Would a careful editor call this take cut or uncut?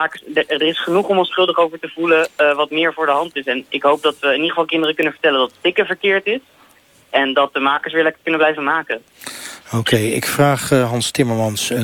uncut